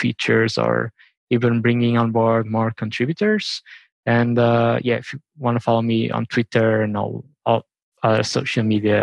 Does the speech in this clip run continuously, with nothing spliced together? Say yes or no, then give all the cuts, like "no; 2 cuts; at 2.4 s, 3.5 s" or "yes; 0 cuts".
yes; 0 cuts